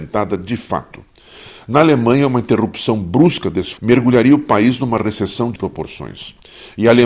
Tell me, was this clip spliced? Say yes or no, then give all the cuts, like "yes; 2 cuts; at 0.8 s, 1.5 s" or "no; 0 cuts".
yes; 2 cuts; at 3.8 s, 5.6 s